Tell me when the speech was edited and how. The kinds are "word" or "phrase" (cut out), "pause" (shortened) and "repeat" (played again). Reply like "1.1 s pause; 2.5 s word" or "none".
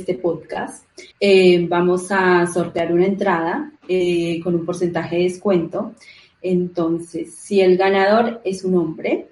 1.1 s pause; 3.8 s pause